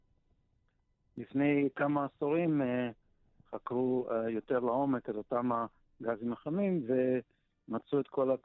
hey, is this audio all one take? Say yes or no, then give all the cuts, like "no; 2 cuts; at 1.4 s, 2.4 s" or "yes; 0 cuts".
yes; 0 cuts